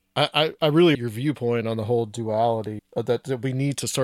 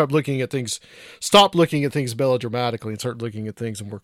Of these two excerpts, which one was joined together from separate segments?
first; 2 cuts; at 0.9 s, 2.8 s

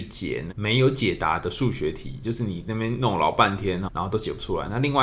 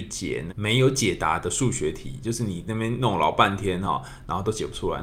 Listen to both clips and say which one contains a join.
first; 1 cut; at 3.9 s

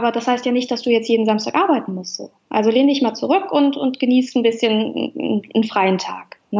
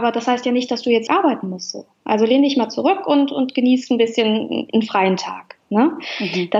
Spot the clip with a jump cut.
second; 2 cuts; at 1.1 s, 4.7 s

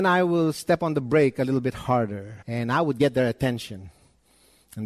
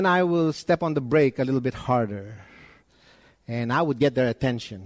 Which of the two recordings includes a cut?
first; 1 cut; at 2.4 s

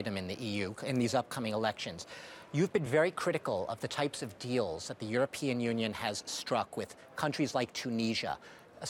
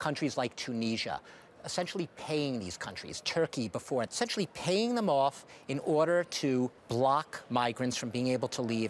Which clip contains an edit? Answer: second; 2 cuts; at 4.1 s, 6.8 s

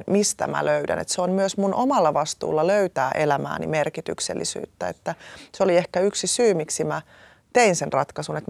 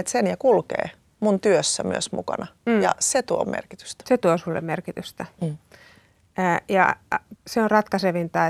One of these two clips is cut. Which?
second; 2 cuts; at 3.4 s, 7.3 s

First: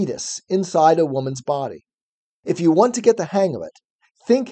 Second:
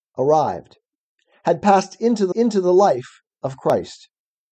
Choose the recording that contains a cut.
second; 1 cut; at 2.3 s

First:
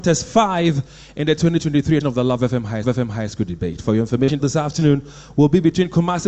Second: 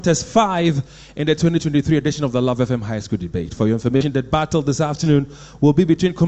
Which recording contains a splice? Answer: first; 3 cuts; at 2.0 s, 2.8 s, 4.4 s

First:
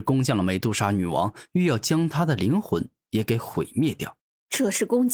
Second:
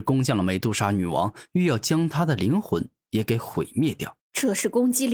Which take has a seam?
second; 1 cut; at 4.2 s

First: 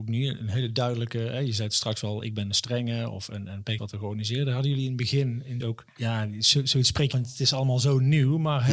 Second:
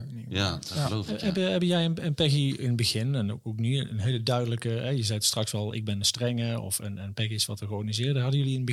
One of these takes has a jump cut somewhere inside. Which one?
first; 3 cuts; at 3.8 s, 5.6 s, 7.1 s

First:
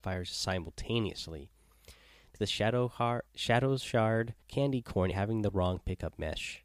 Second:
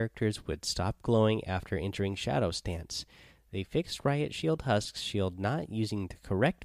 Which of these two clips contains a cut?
first; 4 cuts; at 2.4 s, 3.3 s, 4.4 s, 5.1 s

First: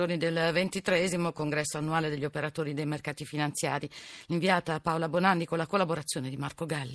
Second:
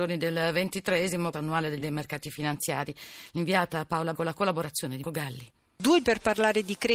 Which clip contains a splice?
second; 5 cuts; at 1.3 s, 1.8 s, 4.1 s, 5.0 s, 6.0 s

